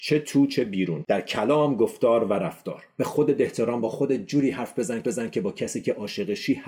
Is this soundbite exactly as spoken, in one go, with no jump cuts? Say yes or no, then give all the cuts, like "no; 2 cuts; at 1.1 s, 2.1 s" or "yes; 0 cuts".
no; 2 cuts; at 3.8 s, 5.0 s